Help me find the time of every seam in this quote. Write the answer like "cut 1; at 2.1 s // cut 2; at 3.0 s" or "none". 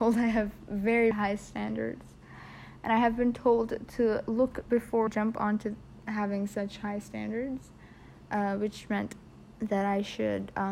cut 1; at 1.1 s // cut 2; at 5.1 s